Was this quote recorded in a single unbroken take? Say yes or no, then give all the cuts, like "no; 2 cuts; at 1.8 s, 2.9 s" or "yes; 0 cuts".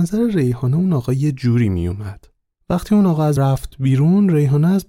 no; 1 cut; at 3.4 s